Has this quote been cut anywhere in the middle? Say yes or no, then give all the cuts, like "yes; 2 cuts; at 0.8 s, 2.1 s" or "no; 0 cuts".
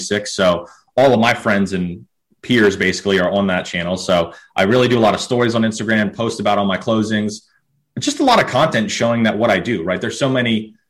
no; 0 cuts